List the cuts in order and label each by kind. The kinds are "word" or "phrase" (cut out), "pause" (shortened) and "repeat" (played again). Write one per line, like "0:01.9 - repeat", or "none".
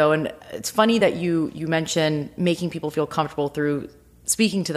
none